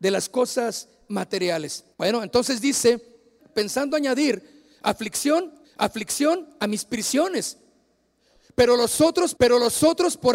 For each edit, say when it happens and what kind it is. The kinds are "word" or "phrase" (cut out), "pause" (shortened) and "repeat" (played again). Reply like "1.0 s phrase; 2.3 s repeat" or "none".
1.9 s pause; 3.4 s word; 5.6 s repeat; 9.4 s repeat